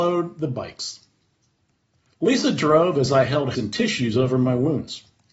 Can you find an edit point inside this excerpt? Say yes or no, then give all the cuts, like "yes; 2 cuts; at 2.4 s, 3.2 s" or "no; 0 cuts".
yes; 1 cut; at 3.5 s